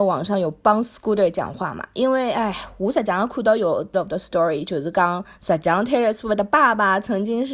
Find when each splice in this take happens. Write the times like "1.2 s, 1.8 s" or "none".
3.9 s